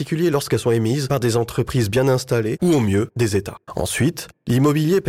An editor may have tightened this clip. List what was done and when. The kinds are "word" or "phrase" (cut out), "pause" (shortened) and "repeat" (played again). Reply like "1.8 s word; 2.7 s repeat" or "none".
3.6 s pause